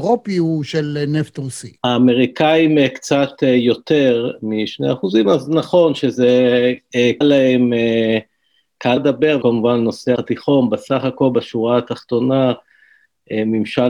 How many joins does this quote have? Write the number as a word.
five